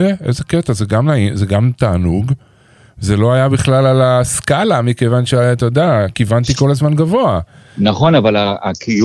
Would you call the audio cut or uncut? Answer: uncut